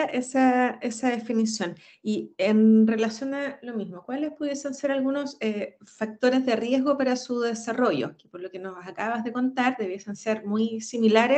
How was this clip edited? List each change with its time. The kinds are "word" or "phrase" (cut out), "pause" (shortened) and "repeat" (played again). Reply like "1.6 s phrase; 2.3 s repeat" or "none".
none